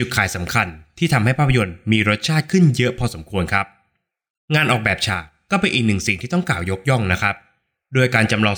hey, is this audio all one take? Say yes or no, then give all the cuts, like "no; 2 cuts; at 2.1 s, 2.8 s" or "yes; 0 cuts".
yes; 0 cuts